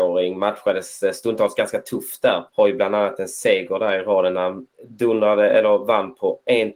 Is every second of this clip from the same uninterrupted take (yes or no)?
no